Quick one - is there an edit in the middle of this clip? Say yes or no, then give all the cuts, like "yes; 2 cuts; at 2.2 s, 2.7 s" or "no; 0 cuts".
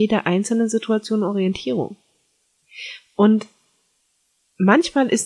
no; 0 cuts